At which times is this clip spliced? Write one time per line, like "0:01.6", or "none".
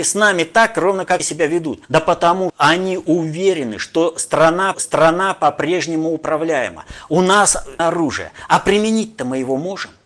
0:01.2
0:01.8
0:02.5
0:04.7
0:07.8

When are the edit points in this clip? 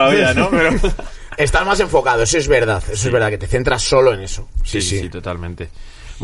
0:04.7

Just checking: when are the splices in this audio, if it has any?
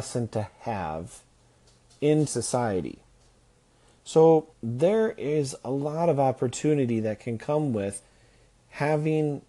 0:02.3
0:04.5

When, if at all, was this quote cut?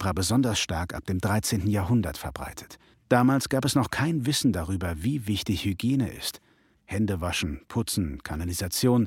0:02.9

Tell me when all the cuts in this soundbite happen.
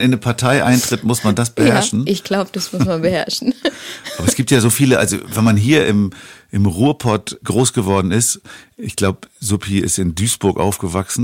0:07.4

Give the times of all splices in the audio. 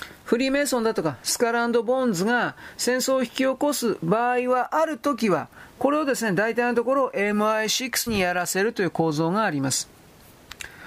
0:08.1

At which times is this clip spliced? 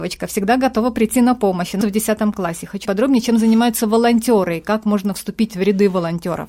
0:01.8
0:02.9

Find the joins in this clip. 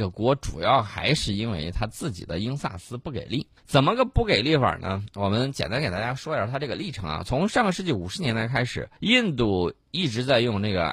0:03.6
0:09.0

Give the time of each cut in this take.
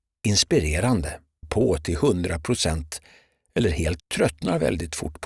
0:01.4
0:04.0

